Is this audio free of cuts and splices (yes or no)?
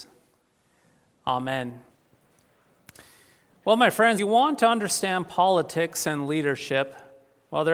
no